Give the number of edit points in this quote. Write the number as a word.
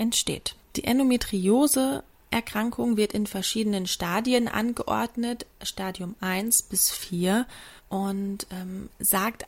one